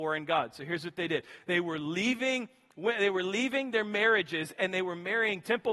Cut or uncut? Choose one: uncut